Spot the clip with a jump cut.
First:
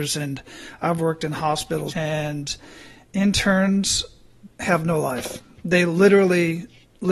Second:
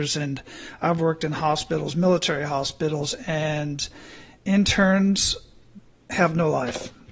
first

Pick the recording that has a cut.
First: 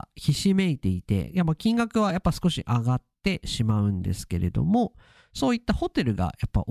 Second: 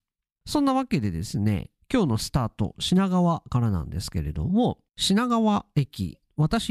second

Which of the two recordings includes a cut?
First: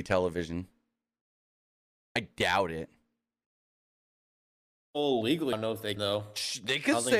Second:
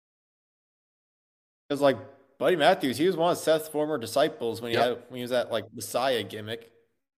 first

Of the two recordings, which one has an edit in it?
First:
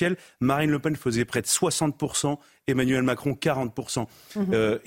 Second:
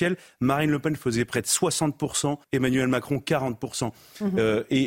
second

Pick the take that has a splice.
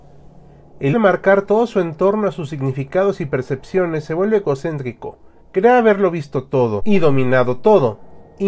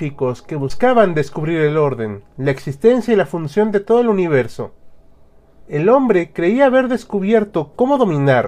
first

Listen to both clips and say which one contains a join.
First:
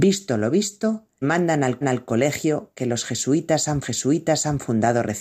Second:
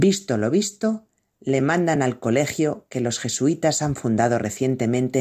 first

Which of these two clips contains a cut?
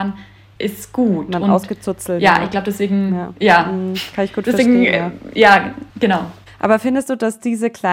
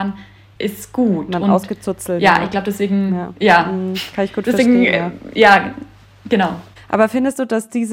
first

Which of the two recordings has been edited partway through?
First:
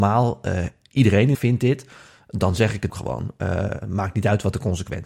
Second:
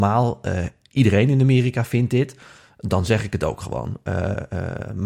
first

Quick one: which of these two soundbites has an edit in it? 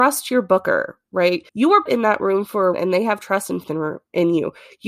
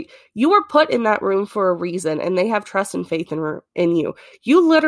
first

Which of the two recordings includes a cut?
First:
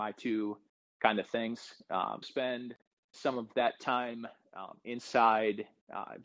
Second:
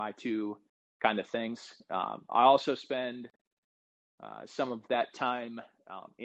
first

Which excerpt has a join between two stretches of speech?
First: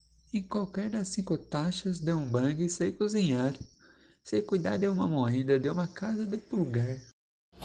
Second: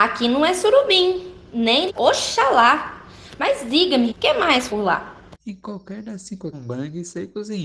second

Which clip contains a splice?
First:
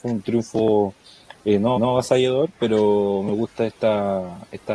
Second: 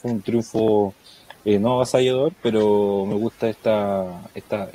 first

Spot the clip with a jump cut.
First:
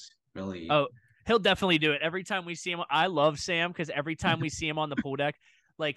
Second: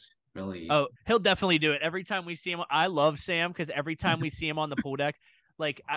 second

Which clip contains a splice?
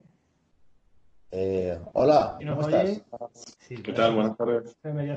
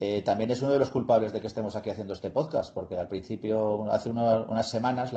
first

